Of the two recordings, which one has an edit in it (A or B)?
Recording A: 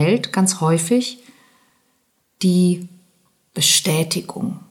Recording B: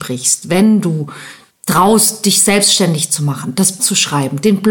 B